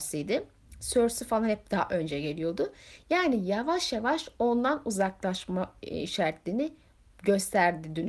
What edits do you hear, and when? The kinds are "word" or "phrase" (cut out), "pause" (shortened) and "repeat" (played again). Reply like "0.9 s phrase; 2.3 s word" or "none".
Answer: none